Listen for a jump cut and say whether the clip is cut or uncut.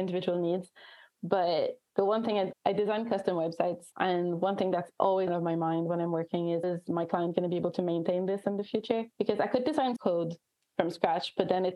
cut